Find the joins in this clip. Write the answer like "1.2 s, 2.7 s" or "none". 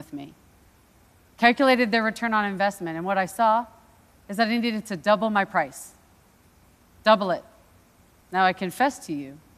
none